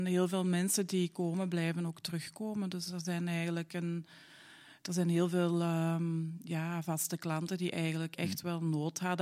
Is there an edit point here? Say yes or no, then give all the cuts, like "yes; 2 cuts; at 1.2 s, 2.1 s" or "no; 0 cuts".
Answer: no; 0 cuts